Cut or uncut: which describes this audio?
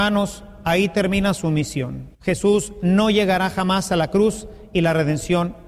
cut